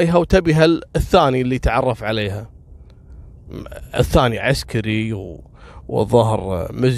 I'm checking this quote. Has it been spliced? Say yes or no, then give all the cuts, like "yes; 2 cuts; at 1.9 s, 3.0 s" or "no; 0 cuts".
no; 0 cuts